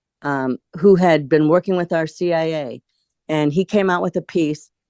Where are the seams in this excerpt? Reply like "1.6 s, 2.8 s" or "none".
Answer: none